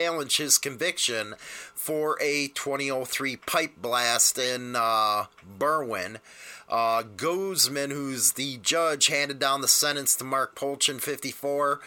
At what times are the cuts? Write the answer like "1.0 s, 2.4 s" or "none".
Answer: none

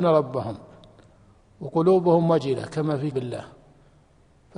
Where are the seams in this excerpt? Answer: 3.1 s

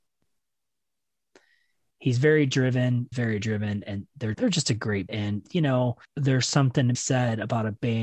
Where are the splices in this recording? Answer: 3.1 s, 4.3 s, 5.1 s, 6.0 s, 6.9 s

